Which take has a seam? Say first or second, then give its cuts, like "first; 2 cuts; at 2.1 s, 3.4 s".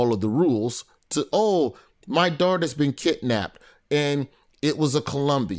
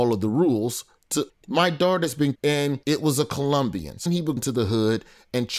second; 5 cuts; at 1.3 s, 2.3 s, 2.8 s, 4.1 s, 4.4 s